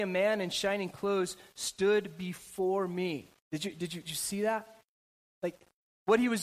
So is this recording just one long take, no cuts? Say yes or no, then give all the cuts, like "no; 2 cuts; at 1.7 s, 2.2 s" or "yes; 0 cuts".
no; 2 cuts; at 3.4 s, 4.0 s